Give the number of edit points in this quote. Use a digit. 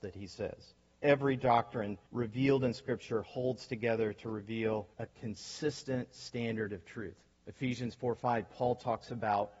4